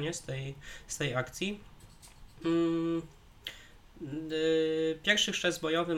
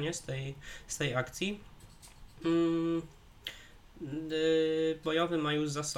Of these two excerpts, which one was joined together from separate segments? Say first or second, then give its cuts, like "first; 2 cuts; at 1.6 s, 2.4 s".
second; 1 cut; at 5.0 s